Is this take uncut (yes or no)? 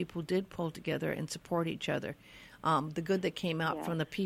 yes